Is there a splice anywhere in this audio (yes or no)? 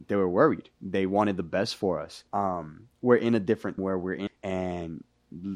yes